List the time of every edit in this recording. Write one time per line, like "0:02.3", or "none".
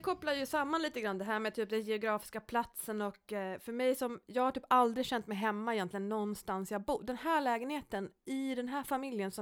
none